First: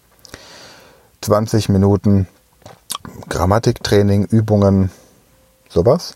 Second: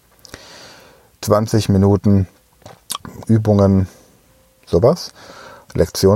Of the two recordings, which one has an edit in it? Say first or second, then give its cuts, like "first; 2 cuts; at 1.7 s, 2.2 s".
second; 1 cut; at 3.2 s